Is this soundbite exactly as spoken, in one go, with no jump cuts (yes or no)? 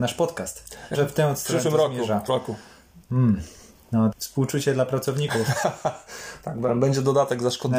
no